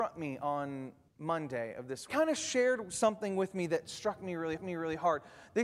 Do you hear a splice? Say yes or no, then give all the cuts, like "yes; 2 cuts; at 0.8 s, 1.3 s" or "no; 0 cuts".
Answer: yes; 3 cuts; at 1.1 s, 2.1 s, 4.6 s